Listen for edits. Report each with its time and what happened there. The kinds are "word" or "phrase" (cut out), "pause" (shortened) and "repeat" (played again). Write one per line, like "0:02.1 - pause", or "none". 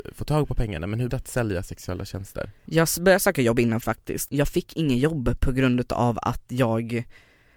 0:01.1 - phrase
0:02.6 - pause
0:03.8 - word
0:04.3 - word